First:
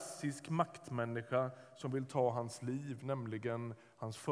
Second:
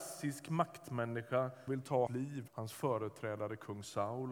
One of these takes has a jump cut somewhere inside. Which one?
second; 3 cuts; at 1.7 s, 2.1 s, 2.5 s

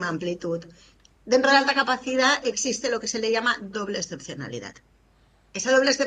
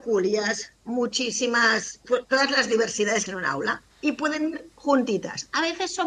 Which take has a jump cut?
second; 2 cuts; at 3.3 s, 3.9 s

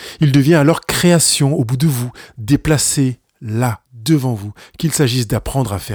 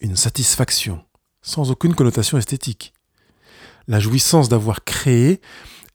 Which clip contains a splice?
first; 1 cut; at 3.9 s

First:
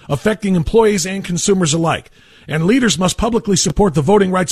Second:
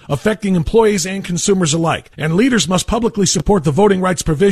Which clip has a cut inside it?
second; 1 cut; at 2.1 s

